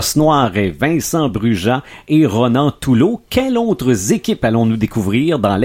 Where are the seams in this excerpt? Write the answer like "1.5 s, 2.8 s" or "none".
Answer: none